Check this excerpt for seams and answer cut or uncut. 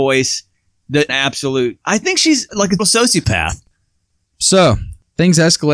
cut